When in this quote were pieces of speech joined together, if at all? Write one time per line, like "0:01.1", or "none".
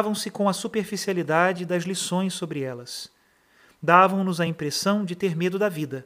none